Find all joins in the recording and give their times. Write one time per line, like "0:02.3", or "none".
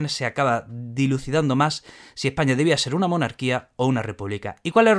none